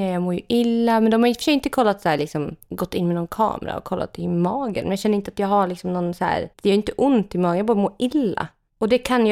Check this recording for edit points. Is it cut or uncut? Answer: cut